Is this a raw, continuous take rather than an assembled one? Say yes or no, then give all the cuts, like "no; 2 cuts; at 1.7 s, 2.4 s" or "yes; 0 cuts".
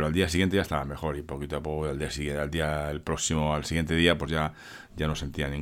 yes; 0 cuts